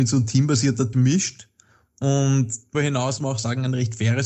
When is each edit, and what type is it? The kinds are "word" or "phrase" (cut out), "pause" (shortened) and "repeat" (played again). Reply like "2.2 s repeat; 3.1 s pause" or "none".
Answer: 0.9 s word; 2.7 s word; 3.2 s word